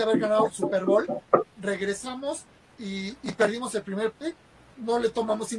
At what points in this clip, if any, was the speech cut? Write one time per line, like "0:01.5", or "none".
0:04.1